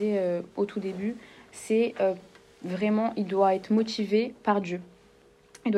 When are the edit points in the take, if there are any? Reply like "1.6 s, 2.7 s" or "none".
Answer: none